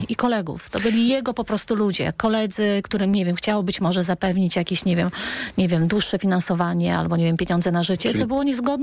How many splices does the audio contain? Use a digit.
0